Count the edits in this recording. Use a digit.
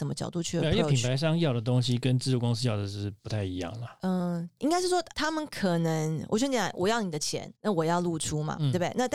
3